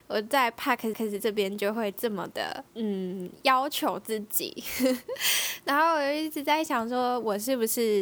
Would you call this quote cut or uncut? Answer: cut